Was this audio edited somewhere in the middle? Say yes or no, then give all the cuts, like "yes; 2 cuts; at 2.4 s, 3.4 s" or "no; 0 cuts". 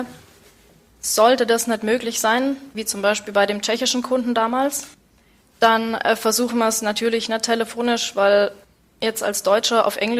no; 0 cuts